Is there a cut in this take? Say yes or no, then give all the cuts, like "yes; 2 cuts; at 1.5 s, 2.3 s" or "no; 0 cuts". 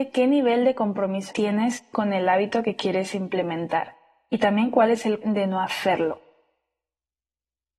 yes; 2 cuts; at 1.3 s, 5.2 s